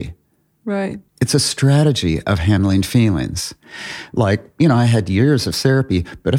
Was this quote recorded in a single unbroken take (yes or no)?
no